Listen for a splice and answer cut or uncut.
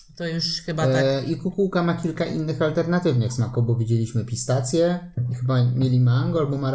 uncut